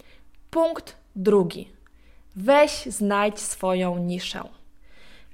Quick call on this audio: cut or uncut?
uncut